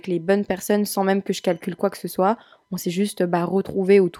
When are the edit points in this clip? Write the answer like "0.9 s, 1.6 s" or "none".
none